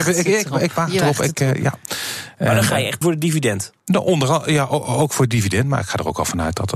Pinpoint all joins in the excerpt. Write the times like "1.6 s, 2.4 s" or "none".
3.0 s, 3.8 s